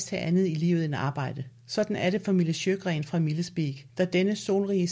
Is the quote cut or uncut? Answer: cut